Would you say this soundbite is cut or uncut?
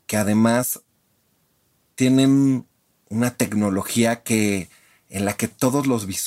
uncut